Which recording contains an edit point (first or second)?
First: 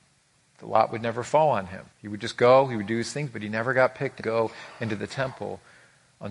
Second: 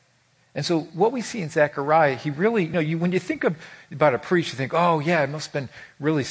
first